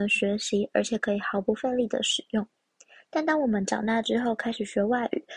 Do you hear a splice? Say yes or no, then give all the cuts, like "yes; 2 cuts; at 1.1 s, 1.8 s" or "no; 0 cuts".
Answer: no; 0 cuts